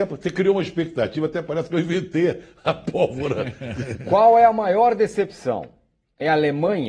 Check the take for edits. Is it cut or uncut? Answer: uncut